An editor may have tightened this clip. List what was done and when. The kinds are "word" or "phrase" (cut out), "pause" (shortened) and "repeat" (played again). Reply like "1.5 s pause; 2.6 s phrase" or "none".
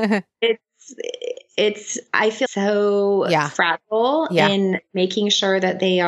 2.5 s phrase